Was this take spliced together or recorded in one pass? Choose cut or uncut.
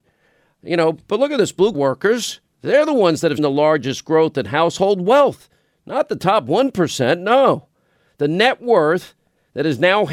cut